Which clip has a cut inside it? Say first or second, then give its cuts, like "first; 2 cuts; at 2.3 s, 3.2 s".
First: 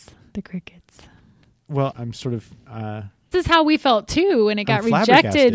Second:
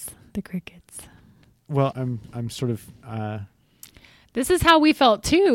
first; 2 cuts; at 1.9 s, 3.3 s